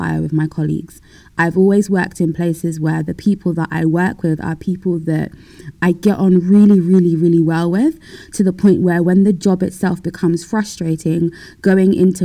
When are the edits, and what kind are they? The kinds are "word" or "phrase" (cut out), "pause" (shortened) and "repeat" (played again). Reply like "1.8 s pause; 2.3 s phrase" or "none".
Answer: 5.7 s word